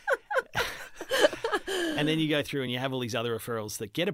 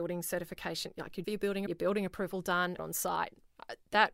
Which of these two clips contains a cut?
second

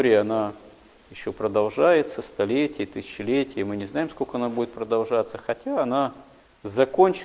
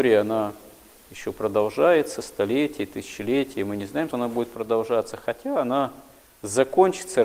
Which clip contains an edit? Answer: second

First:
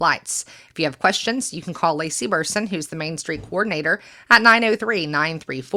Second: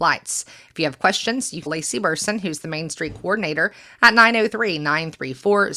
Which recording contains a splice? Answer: second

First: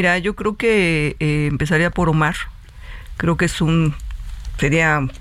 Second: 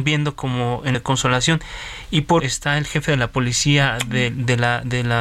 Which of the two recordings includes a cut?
second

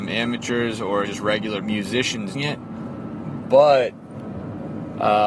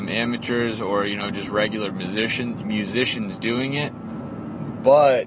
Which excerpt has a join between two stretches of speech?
first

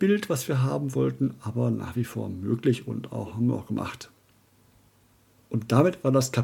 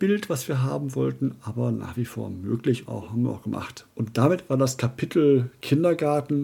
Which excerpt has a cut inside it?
second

